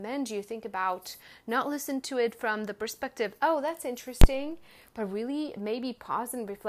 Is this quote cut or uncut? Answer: uncut